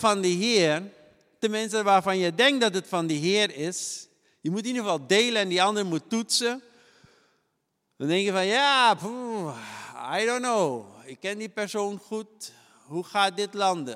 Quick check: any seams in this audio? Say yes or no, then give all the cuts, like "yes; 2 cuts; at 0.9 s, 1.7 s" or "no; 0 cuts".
no; 0 cuts